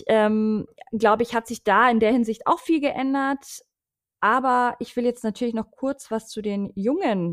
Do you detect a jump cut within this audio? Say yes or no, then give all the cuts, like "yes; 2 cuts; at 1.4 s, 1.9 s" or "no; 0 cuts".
no; 0 cuts